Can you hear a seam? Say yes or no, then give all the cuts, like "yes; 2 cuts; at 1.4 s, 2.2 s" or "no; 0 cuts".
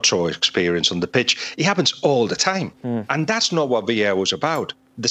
yes; 1 cut; at 2.8 s